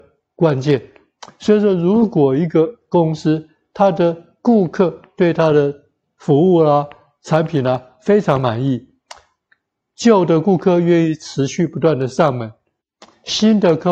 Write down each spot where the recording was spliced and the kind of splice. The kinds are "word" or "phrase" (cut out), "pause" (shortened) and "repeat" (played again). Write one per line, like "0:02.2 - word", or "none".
none